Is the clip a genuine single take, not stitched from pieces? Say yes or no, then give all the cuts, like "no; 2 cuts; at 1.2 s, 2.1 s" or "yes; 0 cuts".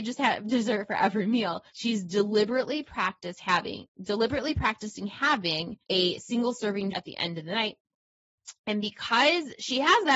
no; 3 cuts; at 1.7 s, 5.8 s, 6.9 s